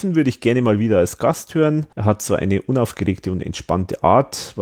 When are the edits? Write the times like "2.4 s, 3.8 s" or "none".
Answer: 1.9 s